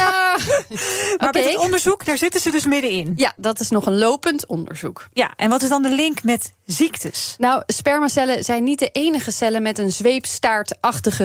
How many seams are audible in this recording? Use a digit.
0